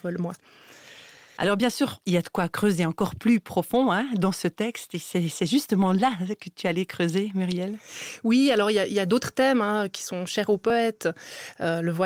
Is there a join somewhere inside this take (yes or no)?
no